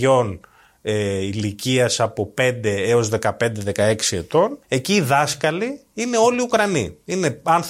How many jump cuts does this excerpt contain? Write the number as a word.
one